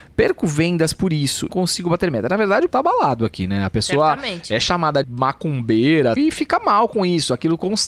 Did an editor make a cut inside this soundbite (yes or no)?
yes